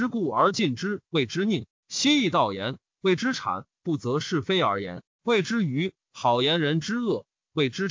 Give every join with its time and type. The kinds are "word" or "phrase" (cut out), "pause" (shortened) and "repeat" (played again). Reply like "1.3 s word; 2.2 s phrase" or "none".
1.1 s pause

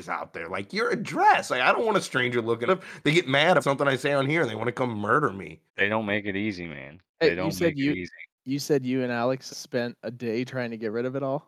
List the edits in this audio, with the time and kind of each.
2.7 s phrase; 3.6 s word; 5.7 s pause; 7.1 s pause; 8.3 s pause; 9.5 s word

